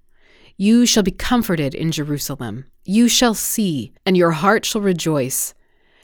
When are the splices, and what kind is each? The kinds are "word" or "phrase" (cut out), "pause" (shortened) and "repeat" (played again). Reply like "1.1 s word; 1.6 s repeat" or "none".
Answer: 2.7 s pause; 4.0 s pause